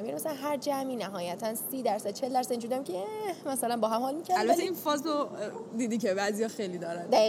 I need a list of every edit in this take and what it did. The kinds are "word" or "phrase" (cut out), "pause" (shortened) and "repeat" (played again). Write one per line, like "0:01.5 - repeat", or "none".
none